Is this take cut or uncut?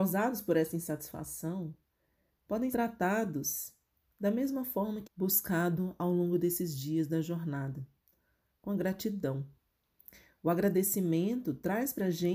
cut